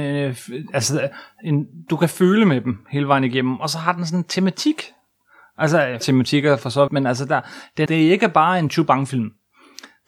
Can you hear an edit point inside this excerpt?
yes; 4 cuts; at 1.9 s, 6.0 s, 6.9 s, 7.9 s

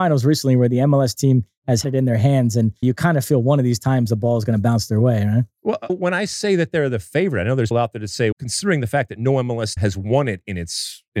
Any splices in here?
yes; 6 cuts; at 1.8 s, 2.8 s, 5.9 s, 7.7 s, 8.3 s, 9.8 s

